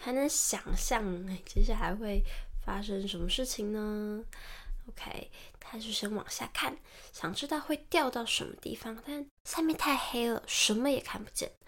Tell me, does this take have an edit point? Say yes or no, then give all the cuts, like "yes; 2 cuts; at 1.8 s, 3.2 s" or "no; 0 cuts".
yes; 2 cuts; at 5.6 s, 9.4 s